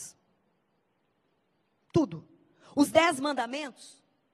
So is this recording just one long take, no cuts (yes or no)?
yes